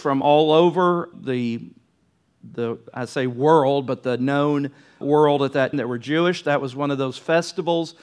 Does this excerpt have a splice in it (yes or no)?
yes